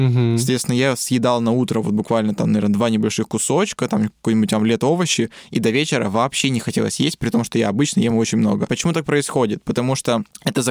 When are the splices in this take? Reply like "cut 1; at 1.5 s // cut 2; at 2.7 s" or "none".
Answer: none